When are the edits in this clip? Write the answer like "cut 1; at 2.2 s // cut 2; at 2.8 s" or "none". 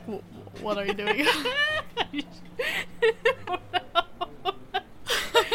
cut 1; at 3.4 s